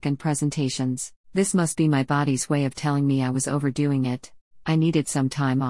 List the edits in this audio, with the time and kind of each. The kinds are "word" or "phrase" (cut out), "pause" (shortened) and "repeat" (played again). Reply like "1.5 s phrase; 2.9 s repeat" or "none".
1.2 s pause